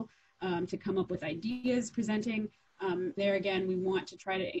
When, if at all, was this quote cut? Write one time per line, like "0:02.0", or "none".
0:01.9
0:03.2